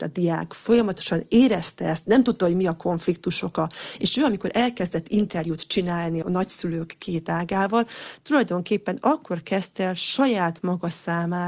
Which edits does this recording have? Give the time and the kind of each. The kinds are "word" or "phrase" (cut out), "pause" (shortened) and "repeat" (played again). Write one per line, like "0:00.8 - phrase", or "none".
0:06.2 - word